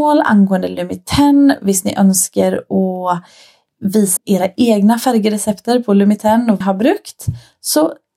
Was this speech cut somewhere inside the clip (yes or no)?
yes